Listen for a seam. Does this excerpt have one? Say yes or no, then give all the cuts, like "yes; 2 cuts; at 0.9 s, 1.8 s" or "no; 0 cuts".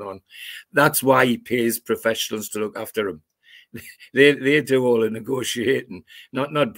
no; 0 cuts